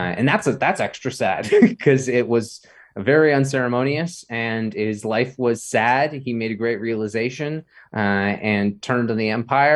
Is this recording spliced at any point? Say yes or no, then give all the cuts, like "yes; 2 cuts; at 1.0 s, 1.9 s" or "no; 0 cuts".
no; 0 cuts